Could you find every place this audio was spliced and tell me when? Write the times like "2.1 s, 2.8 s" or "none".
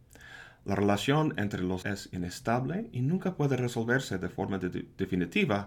1.8 s